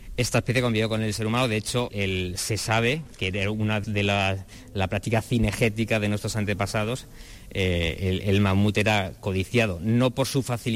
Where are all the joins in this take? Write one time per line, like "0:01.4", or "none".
0:01.9
0:03.8